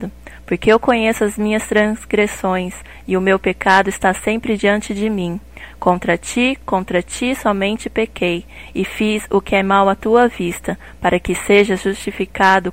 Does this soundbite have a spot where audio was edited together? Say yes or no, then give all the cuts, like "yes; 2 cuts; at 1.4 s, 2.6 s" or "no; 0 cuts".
no; 0 cuts